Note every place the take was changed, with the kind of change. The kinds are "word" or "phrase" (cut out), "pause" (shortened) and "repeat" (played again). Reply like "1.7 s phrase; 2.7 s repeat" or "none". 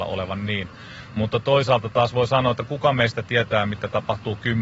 none

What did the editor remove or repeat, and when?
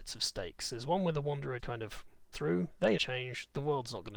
1.6 s word; 2.3 s word; 3.0 s word

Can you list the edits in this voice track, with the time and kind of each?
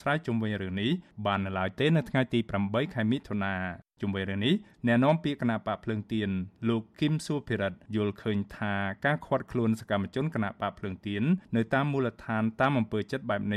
3.9 s pause

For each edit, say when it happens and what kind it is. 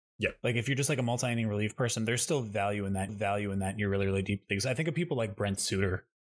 3.1 s repeat

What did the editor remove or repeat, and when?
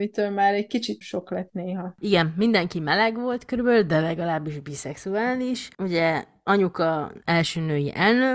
1.0 s word

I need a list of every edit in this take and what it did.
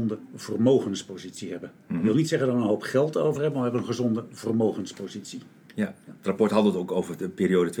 none

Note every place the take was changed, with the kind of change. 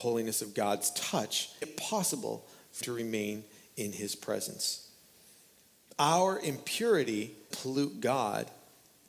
1.6 s word; 2.8 s word; 7.5 s word

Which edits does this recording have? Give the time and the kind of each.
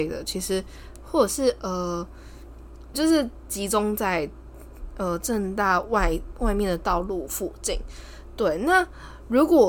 2.9 s word

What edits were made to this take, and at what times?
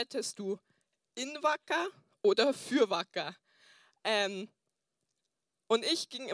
none

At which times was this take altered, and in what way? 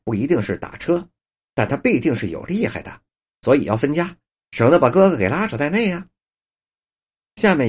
none

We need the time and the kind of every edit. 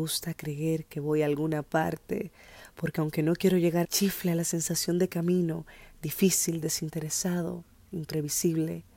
3.8 s phrase

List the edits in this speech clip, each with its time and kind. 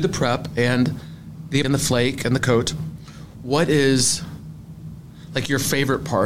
1.6 s word; 2.4 s word

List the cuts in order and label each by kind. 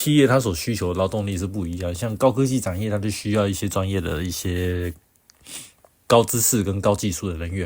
none

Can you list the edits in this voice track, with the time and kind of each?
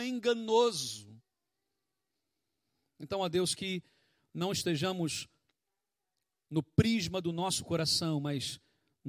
none

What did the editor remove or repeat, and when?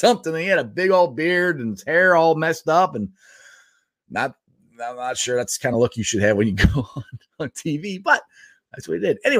none

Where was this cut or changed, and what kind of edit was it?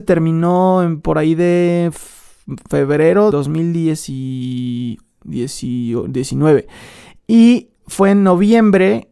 3.3 s word; 7.8 s pause

